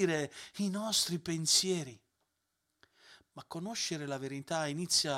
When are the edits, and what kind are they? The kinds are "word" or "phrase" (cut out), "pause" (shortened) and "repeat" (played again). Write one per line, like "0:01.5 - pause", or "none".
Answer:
none